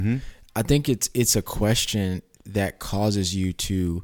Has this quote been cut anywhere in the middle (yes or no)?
no